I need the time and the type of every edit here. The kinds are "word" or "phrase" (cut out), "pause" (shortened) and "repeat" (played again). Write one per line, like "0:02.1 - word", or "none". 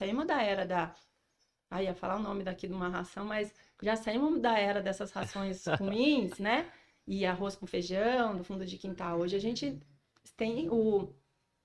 none